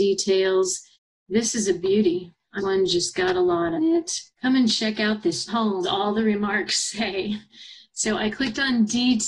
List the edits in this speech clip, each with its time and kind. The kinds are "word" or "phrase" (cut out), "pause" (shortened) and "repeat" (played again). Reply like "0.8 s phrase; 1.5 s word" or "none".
0.9 s pause; 2.6 s phrase; 3.8 s phrase; 4.3 s pause; 5.5 s word; 5.8 s word